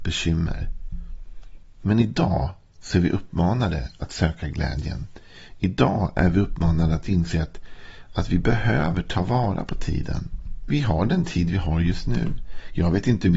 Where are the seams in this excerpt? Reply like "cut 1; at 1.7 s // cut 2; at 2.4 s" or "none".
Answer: none